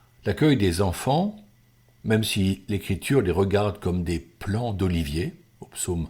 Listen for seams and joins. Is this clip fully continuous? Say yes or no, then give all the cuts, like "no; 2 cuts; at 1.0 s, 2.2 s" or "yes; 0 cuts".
yes; 0 cuts